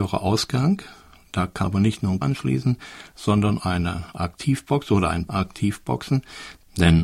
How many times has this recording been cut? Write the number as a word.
four